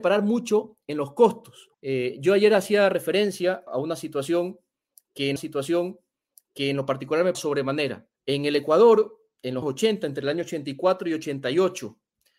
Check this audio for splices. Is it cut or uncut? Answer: cut